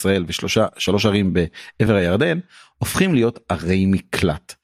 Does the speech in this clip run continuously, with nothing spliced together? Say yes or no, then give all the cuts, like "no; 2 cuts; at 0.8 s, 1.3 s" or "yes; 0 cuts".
yes; 0 cuts